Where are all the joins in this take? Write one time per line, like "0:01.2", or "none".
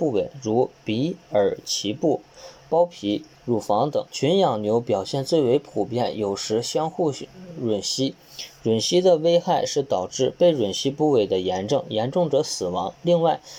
0:03.3
0:04.1